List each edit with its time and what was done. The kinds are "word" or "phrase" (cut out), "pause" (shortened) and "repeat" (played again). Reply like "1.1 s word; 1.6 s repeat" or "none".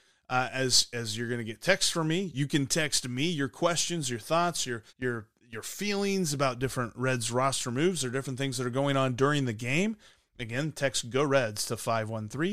4.9 s pause